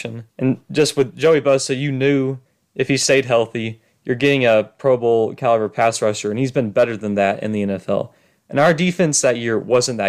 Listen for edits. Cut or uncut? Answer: uncut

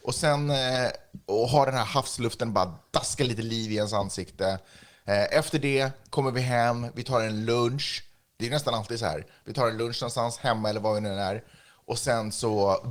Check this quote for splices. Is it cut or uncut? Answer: uncut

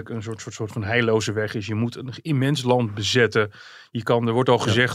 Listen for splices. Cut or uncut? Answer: uncut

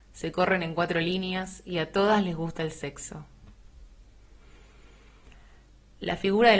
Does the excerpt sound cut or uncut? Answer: uncut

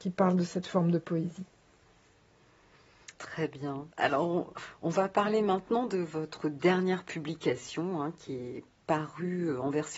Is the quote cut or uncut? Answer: cut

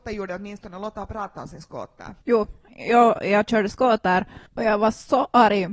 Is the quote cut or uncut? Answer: cut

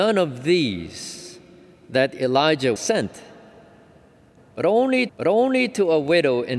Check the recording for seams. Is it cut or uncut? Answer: cut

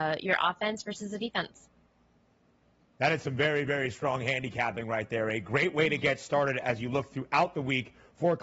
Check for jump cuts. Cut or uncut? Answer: uncut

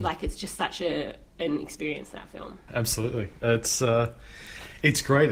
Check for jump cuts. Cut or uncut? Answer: uncut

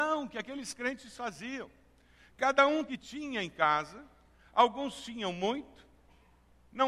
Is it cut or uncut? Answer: cut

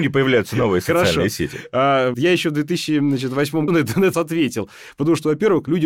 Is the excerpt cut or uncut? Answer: cut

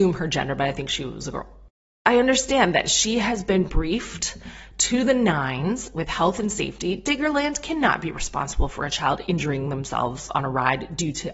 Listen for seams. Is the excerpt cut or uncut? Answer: uncut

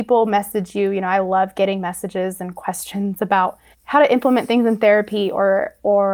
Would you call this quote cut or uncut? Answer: cut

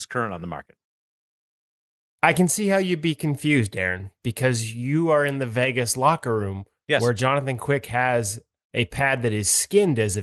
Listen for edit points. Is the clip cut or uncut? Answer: uncut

